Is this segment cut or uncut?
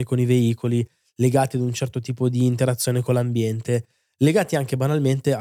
uncut